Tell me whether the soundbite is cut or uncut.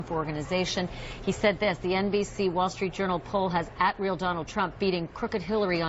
uncut